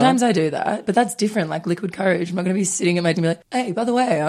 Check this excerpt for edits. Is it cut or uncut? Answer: cut